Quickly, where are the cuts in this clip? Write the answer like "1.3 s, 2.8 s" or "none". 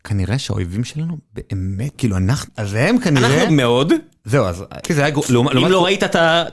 1.9 s, 2.5 s, 3.5 s, 4.8 s